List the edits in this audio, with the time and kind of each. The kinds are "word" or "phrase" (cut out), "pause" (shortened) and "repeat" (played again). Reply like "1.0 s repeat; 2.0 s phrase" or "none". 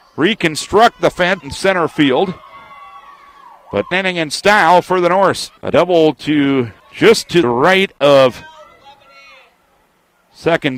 1.4 s word; 3.9 s phrase; 5.6 s pause; 6.8 s pause; 7.4 s word